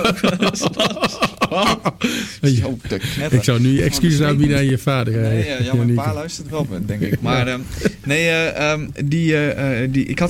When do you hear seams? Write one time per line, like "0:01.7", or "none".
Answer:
none